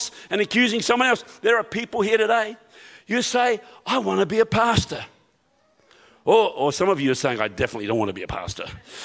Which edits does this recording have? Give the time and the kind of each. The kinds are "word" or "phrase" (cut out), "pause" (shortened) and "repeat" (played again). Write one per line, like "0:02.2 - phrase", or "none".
none